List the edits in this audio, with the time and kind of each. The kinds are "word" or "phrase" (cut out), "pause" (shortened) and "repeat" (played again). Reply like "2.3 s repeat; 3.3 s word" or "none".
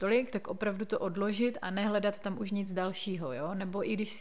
none